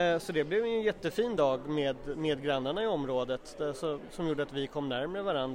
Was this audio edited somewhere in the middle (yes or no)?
no